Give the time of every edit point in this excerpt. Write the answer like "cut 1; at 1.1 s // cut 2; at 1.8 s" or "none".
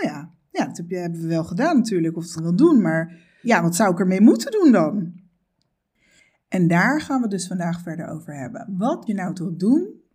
cut 1; at 2.4 s // cut 2; at 3.4 s // cut 3; at 9.1 s